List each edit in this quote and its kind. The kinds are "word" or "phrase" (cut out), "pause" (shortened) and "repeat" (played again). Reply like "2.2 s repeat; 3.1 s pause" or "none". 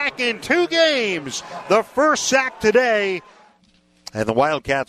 none